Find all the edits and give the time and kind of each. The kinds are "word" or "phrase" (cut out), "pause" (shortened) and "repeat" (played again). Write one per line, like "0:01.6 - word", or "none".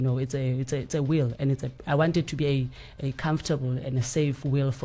0:03.0 - phrase